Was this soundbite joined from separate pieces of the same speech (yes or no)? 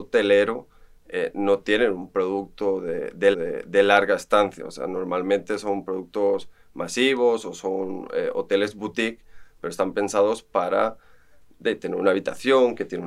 yes